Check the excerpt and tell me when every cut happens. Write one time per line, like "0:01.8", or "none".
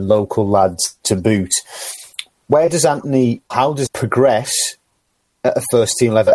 0:01.0
0:03.5
0:03.9

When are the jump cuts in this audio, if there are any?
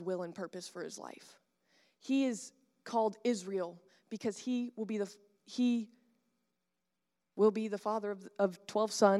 none

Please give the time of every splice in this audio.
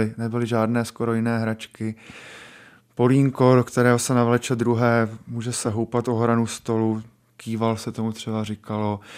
none

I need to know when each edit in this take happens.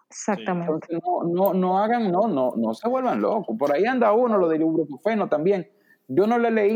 none

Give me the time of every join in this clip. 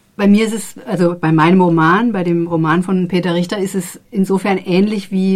0:04.0

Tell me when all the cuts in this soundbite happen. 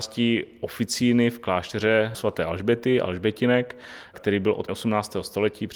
0:02.1
0:04.7

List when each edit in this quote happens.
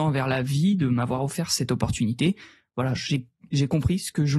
none

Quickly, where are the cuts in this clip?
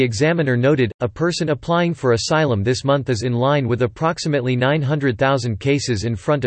none

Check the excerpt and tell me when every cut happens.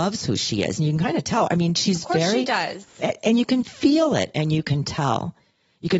none

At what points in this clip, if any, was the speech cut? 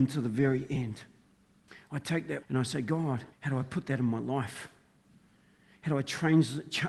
0:01.7
0:02.4
0:03.3

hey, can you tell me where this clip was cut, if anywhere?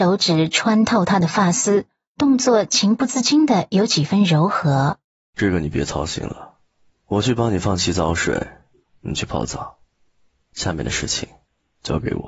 0:05.1

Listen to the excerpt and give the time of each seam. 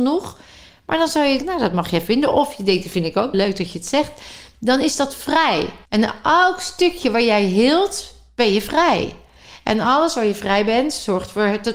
0:01.4
0:03.3
0:05.8

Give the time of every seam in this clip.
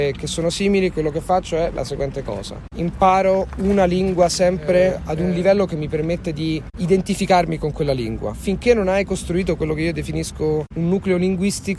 none

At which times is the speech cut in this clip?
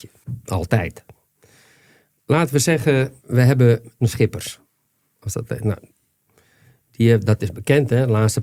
0:03.2
0:04.0

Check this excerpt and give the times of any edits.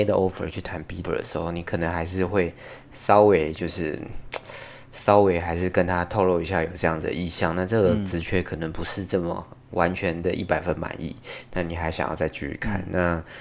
0:01.1

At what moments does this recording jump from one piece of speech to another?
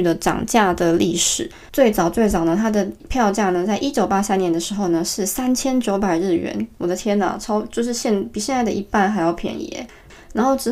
0:01.7

